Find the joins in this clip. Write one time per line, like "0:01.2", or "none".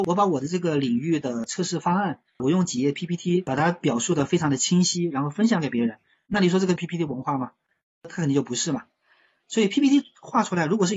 0:02.3
0:06.8